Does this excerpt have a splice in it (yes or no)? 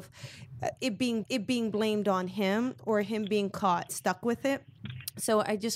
yes